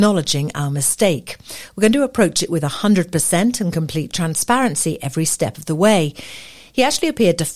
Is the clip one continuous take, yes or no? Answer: yes